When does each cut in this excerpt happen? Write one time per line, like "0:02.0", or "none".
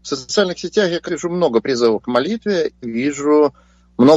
0:01.1
0:02.0
0:02.8